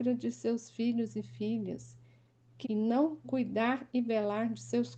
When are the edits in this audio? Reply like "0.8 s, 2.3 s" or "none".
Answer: 2.6 s, 3.2 s